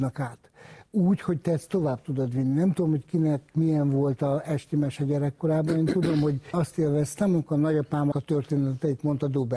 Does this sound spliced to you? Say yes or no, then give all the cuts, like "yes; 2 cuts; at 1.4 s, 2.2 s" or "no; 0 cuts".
yes; 3 cuts; at 3.5 s, 6.5 s, 8.1 s